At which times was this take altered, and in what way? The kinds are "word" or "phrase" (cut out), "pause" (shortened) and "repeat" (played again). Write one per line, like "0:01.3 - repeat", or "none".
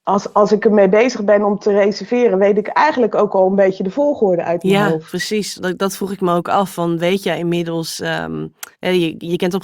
0:08.7 - pause

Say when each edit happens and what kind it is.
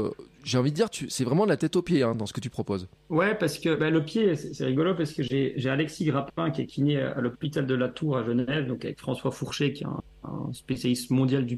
none

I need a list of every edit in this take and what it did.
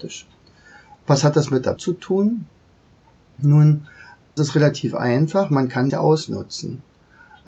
0:01.8 - word
0:04.4 - word
0:05.9 - word

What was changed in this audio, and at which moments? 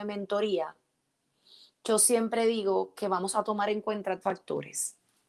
0:04.2 - word

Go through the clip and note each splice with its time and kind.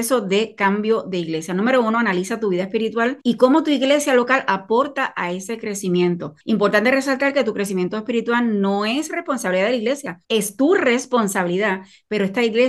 0:03.2 - pause
0:06.4 - pause
0:10.2 - pause

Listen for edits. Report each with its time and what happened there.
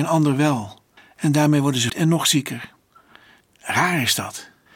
0:01.9 - word

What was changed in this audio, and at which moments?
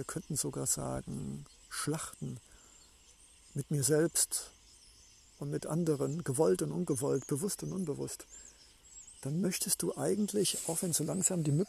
none

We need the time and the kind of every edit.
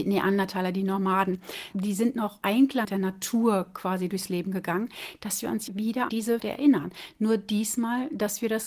0:01.7 - word
0:02.4 - word
0:02.8 - word
0:05.7 - word
0:06.1 - word
0:06.4 - word

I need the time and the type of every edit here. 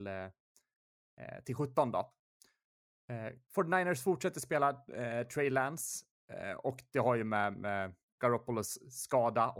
0:03.4 - pause
0:08.0 - pause

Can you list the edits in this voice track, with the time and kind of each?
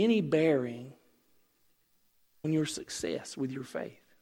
0:02.4 - word

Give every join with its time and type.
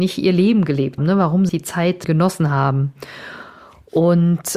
0:01.0 - word
0:01.5 - word
0:02.0 - word

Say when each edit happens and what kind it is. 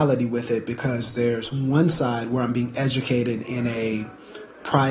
none

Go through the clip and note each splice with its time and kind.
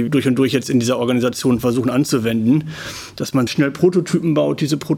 0:03.5 - word

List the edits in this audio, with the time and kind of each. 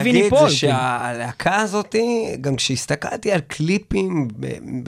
none

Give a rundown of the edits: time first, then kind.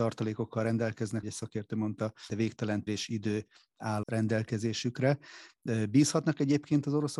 0:01.2 - word
0:02.3 - word
0:02.9 - word
0:04.0 - word

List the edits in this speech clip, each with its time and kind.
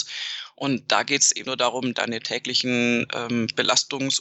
0:01.4 - word
0:01.9 - word

